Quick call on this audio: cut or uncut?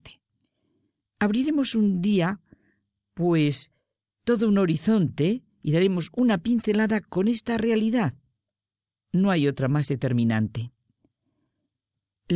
uncut